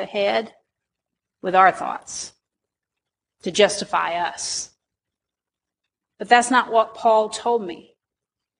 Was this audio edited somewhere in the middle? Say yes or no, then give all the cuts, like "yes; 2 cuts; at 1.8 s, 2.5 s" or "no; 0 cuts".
no; 0 cuts